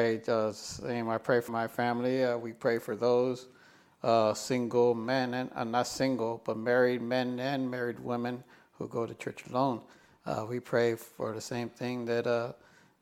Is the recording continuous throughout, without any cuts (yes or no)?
no